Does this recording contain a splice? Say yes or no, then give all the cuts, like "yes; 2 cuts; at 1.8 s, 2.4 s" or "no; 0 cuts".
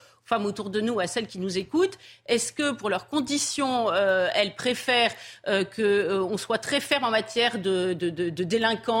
no; 0 cuts